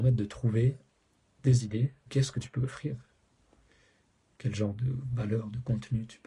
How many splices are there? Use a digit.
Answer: 1